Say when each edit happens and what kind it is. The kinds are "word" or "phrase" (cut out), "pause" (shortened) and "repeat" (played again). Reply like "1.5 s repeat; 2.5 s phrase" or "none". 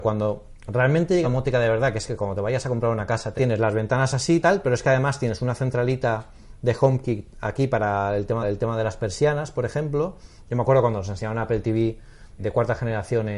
1.2 s word; 3.4 s phrase; 4.4 s word; 8.4 s repeat; 12.4 s word